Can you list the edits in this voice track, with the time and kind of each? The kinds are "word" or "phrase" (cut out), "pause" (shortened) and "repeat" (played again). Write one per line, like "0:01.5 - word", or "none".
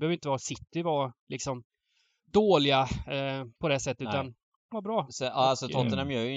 0:01.2 - pause
0:03.6 - pause
0:04.7 - phrase

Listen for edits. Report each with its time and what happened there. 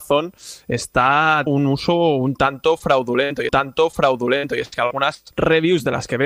0:01.5 - word
0:03.5 - repeat
0:05.3 - pause

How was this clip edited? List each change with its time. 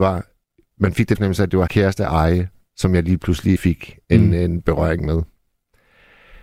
0:01.1 - phrase
0:01.7 - word
0:03.6 - phrase

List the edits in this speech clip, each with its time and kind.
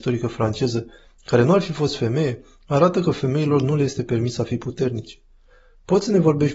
none

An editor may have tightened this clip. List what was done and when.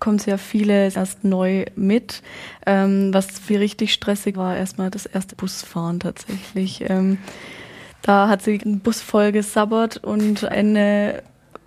0:00.9 - word
0:03.5 - word
0:04.3 - word
0:05.3 - word
0:08.6 - word
0:10.5 - word

